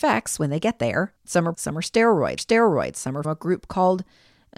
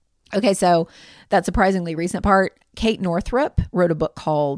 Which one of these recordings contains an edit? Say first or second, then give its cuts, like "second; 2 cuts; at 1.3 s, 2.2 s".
first; 4 cuts; at 1.2 s, 1.5 s, 2.4 s, 3.2 s